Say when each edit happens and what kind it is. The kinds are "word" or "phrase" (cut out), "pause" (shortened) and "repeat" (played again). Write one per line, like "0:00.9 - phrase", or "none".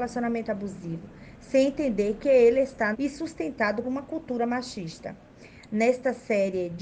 0:02.9 - phrase
0:03.8 - word